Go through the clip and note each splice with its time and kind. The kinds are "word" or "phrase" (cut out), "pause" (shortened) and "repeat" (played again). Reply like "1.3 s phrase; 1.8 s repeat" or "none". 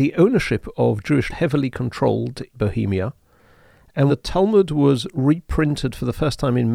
1.3 s phrase; 2.5 s word; 4.1 s word